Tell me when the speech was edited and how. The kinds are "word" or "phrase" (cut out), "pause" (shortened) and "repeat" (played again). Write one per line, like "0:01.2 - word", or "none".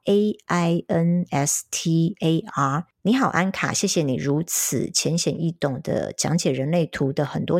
none